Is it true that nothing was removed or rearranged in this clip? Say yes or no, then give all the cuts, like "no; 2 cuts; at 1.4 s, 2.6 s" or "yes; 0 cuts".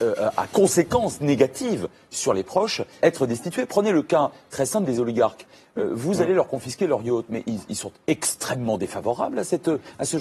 no; 1 cut; at 3.0 s